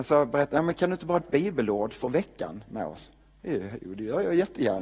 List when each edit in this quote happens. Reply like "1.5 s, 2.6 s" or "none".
1.2 s, 2.7 s